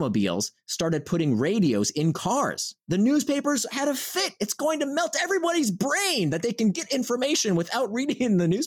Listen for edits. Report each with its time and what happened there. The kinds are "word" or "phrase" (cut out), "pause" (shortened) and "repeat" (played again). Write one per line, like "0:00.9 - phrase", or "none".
none